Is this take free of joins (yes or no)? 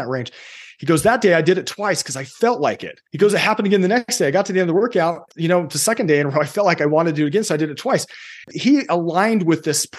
no